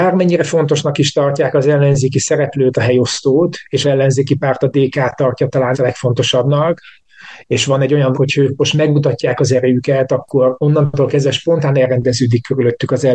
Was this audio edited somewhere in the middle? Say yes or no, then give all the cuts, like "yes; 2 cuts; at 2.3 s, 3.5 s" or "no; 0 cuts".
yes; 4 cuts; at 2.7 s, 3.8 s, 5.7 s, 8.1 s